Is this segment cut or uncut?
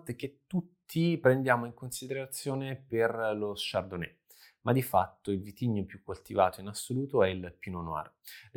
uncut